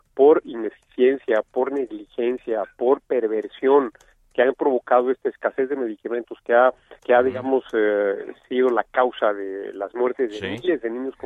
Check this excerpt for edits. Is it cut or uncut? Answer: cut